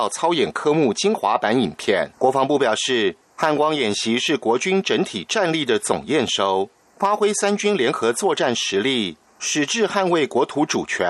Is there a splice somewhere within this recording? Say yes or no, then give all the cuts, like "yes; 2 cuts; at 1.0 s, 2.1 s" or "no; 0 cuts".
yes; 1 cut; at 2.1 s